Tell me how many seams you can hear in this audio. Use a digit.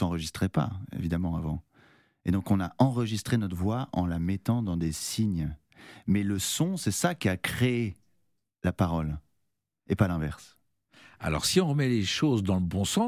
0